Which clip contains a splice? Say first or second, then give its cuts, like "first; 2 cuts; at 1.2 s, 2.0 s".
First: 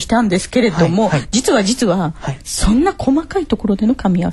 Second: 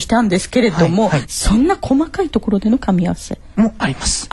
second; 1 cut; at 1.3 s